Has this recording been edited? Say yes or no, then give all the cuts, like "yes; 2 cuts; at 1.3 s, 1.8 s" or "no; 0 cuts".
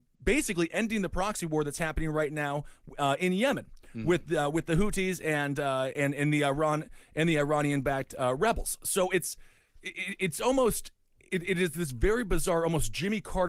no; 0 cuts